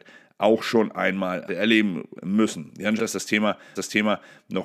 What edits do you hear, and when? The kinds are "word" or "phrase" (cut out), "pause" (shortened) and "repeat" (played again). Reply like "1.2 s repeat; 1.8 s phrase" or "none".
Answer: 1.5 s word; 3.0 s phrase; 3.8 s repeat

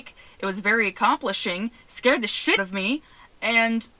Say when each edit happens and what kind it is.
2.6 s word

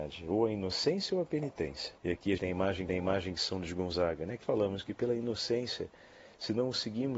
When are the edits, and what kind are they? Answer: 2.0 s pause; 2.4 s word; 2.9 s repeat; 4.4 s word

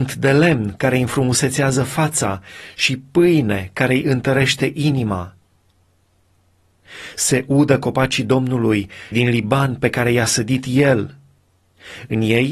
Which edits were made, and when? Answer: 9.1 s word

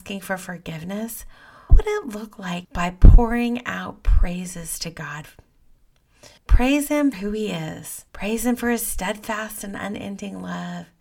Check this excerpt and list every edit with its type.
1.7 s word; 2.6 s phrase; 6.4 s pause; 7.1 s word; 8.1 s pause

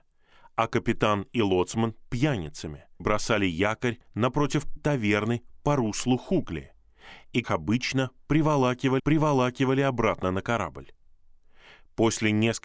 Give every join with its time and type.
3.0 s word; 4.8 s word; 7.4 s word; 9.0 s repeat

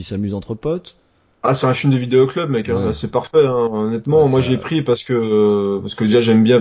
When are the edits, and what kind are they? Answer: none

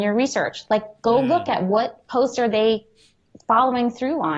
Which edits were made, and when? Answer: none

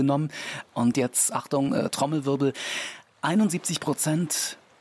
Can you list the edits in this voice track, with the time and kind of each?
none

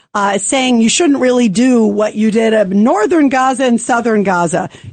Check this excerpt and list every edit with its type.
none

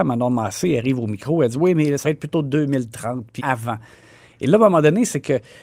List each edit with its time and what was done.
2.0 s word; 3.4 s word

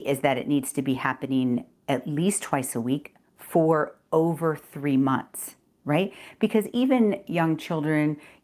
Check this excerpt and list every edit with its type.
none

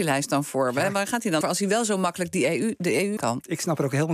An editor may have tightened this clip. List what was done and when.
1.4 s word; 3.2 s word

